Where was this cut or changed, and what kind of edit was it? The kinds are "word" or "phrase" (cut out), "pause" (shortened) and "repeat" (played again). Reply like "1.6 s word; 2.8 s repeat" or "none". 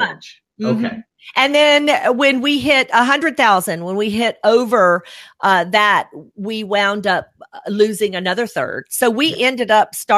none